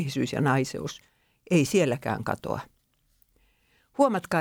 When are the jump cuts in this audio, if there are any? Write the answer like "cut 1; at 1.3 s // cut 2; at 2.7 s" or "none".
none